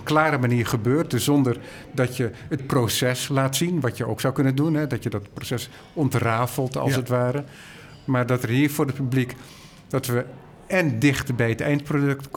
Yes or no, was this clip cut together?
yes